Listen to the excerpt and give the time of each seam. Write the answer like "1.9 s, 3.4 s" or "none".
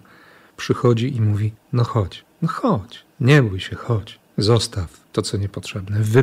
2.3 s, 3.1 s, 4.3 s